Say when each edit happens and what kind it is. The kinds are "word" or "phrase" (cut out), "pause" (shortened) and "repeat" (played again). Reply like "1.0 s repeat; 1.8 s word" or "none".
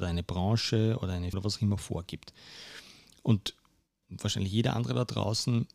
1.3 s word; 4.0 s word